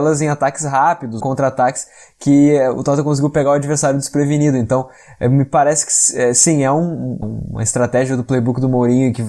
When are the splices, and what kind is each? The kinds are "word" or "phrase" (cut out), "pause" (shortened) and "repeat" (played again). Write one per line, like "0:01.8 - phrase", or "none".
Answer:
0:01.2 - phrase
0:07.2 - word